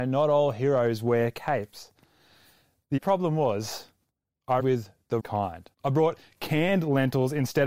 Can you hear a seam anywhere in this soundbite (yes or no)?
yes